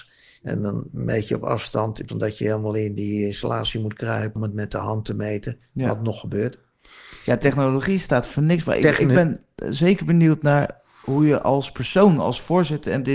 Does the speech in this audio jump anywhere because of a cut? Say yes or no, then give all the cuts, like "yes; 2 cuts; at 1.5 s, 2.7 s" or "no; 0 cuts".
yes; 2 cuts; at 2.1 s, 4.4 s